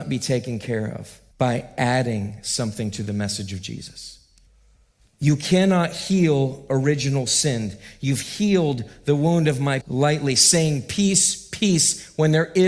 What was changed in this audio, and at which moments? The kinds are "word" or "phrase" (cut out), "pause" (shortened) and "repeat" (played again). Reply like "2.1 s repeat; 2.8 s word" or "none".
1.3 s pause; 4.5 s pause; 9.8 s word